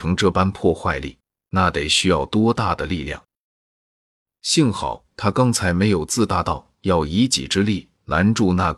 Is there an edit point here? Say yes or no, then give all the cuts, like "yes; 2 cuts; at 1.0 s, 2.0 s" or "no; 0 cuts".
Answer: no; 0 cuts